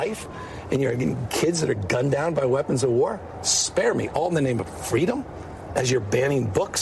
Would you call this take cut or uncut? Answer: uncut